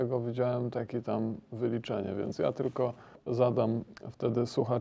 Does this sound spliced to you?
yes; 1 cut; at 3.1 s

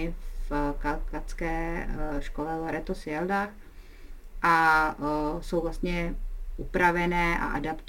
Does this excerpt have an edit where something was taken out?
no; 0 cuts

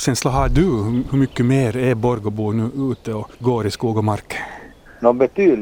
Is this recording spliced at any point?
yes; 1 cut; at 3.3 s

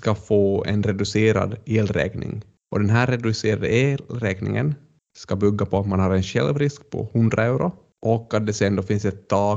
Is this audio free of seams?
yes; 0 cuts

